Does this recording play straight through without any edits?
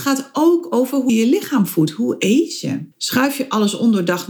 no; 2 cuts; at 1.1 s, 2.9 s

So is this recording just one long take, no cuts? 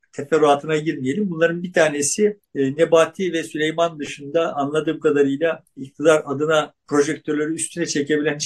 no; 2 cuts; at 2.4 s, 6.8 s

